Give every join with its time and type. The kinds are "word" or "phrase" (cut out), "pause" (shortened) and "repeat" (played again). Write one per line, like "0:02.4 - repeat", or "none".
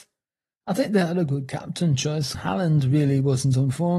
0:02.3 - word